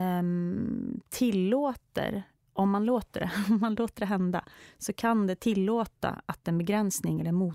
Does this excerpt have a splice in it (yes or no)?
no